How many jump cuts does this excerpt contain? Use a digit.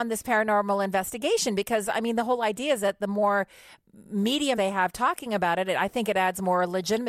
1